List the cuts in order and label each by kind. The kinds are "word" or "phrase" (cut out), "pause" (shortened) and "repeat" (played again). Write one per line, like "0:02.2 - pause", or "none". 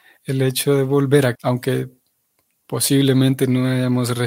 0:01.4 - word